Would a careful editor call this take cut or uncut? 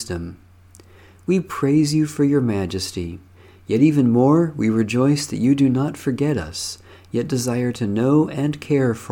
uncut